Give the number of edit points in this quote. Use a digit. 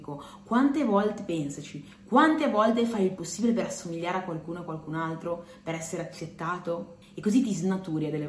1